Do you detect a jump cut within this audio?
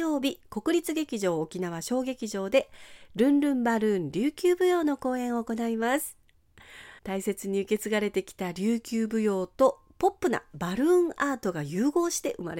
yes; 1 cut; at 7.0 s

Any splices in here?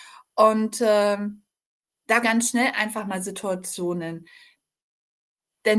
yes; 1 cut; at 2.2 s

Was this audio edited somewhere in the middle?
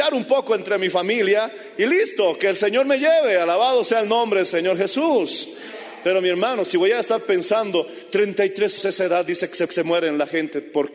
yes; 2 cuts; at 8.8 s, 9.7 s

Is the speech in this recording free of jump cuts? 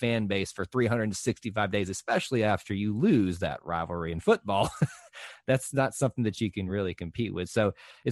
yes; 0 cuts

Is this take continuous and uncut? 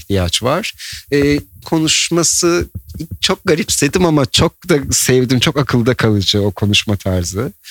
no; 1 cut; at 1.6 s

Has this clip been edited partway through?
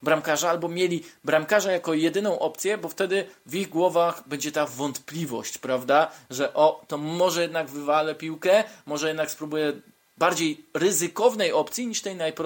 no; 0 cuts

